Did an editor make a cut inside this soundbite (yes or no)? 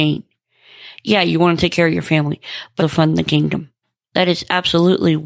yes